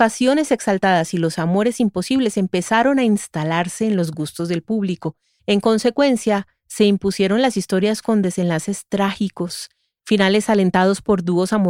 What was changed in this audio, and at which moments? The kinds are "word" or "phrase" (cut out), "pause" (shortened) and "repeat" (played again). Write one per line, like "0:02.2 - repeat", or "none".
none